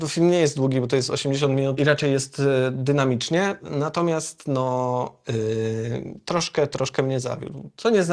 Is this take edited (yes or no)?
yes